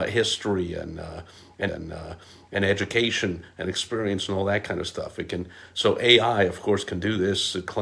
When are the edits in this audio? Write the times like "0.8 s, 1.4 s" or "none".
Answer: 1.7 s